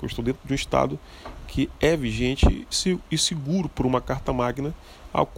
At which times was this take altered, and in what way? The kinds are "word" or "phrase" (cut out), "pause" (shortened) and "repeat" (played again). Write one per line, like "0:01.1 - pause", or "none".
0:02.7 - word

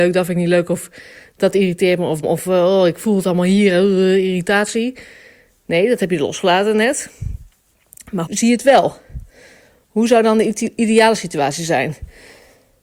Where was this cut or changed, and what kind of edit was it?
0:02.2 - word
0:08.3 - word

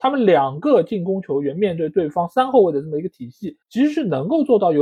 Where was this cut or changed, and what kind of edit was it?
0:03.6 - pause

